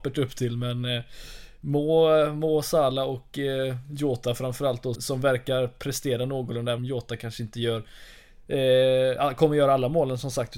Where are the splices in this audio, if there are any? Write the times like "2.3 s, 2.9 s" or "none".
4.9 s, 6.8 s

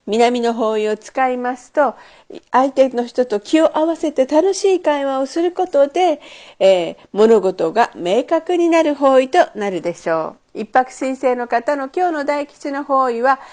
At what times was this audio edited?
10.4 s

